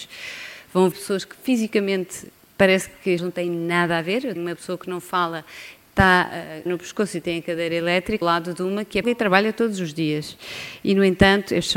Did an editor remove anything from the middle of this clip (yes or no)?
yes